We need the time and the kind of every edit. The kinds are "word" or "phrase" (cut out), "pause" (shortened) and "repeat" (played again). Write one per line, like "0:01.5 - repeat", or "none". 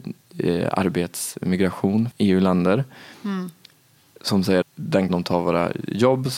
0:02.1 - word
0:04.6 - word
0:05.1 - word